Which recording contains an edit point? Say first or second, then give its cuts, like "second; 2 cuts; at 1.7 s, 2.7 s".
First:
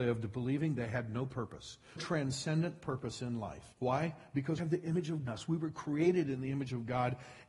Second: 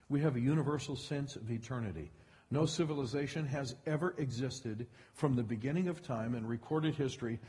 first; 4 cuts; at 2.0 s, 3.7 s, 4.6 s, 5.3 s